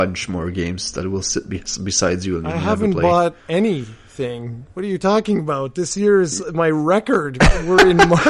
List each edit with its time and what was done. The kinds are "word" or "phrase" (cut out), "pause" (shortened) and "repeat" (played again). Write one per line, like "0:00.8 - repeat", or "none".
0:03.4 - pause